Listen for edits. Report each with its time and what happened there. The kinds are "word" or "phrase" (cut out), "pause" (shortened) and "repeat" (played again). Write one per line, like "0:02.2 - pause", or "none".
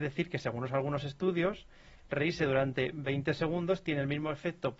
none